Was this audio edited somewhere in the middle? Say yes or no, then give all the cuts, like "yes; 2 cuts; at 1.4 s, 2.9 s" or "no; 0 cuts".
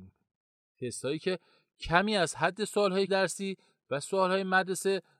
yes; 1 cut; at 3.1 s